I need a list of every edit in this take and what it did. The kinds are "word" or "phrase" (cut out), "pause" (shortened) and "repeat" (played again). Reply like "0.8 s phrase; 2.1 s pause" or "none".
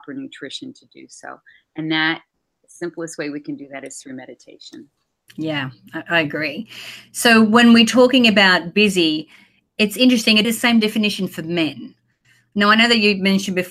10.4 s phrase